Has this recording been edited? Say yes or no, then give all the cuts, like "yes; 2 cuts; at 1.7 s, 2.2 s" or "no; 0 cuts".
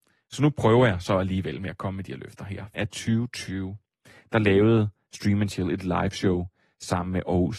yes; 1 cut; at 2.7 s